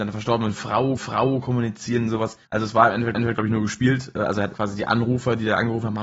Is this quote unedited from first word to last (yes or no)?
no